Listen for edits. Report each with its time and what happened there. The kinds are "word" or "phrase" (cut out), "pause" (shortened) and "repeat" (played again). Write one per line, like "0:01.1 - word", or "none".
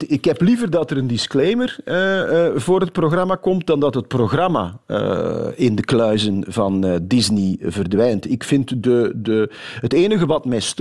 none